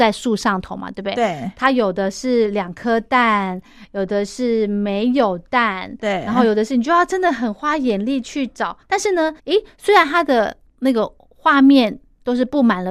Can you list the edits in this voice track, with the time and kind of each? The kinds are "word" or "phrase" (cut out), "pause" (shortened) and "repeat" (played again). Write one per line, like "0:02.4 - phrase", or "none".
0:08.8 - pause
0:09.4 - pause